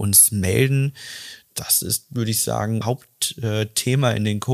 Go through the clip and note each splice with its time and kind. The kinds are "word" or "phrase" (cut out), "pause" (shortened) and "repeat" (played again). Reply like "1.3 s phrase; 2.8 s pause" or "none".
2.8 s word